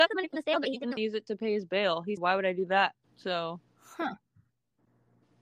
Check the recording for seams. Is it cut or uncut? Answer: cut